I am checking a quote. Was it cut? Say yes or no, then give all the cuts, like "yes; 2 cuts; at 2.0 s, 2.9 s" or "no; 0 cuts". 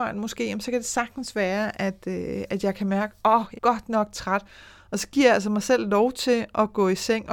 yes; 1 cut; at 3.5 s